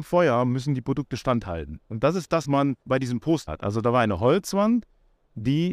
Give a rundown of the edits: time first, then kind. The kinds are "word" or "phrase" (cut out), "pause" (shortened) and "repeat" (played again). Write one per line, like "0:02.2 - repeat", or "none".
0:02.4 - word
0:02.8 - pause
0:03.5 - word